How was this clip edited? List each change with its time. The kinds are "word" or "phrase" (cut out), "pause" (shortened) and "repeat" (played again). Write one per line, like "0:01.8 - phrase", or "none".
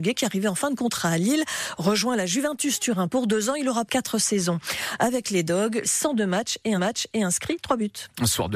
0:03.9 - phrase
0:05.8 - word
0:06.8 - repeat